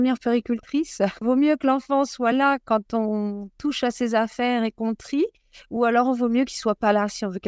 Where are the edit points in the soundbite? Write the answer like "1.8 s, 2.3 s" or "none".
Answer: none